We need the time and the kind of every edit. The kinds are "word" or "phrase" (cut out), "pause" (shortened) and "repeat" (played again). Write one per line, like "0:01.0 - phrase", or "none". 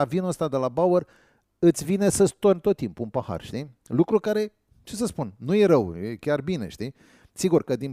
none